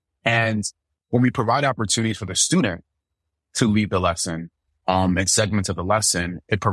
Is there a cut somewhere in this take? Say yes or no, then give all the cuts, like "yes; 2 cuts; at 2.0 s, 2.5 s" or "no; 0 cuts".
no; 0 cuts